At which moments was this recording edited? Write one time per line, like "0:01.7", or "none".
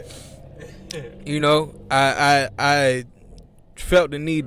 none